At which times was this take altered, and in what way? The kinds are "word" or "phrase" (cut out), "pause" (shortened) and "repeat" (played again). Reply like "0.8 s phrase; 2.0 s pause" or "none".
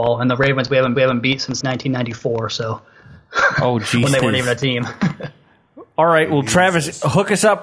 1.0 s repeat; 1.6 s word

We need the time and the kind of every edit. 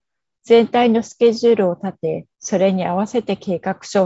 2.3 s pause

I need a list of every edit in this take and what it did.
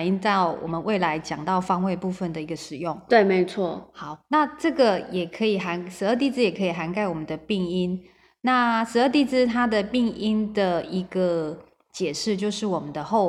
none

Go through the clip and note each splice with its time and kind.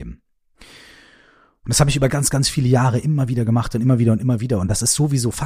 2.1 s word

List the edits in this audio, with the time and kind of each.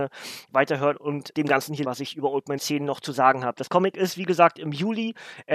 1.3 s word; 1.8 s word; 2.6 s word

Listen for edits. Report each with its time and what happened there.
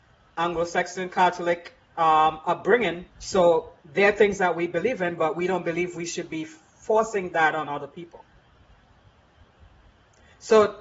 3.1 s pause

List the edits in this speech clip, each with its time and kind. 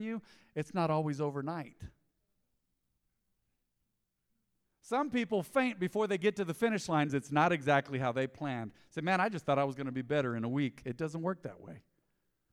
7.1 s word

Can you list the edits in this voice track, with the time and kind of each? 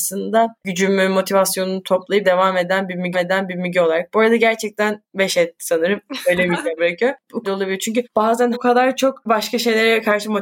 2.2 s word; 3.1 s repeat; 5.1 s pause; 6.8 s word; 7.4 s phrase; 8.5 s word; 9.3 s word

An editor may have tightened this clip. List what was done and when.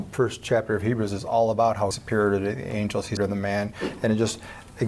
1.9 s word; 3.2 s word

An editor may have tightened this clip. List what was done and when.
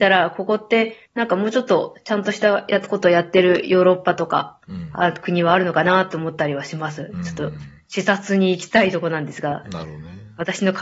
1.1 s pause

